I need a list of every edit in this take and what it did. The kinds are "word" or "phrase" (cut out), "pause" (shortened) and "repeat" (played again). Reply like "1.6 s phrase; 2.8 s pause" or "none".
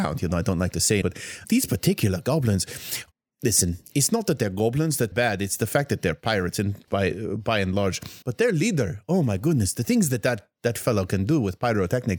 1.0 s word; 1.4 s word; 3.1 s pause; 5.1 s word; 6.9 s phrase; 8.2 s pause